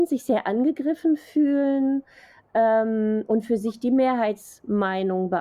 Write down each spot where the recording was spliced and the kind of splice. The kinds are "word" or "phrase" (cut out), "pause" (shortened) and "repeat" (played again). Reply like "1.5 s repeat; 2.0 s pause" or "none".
none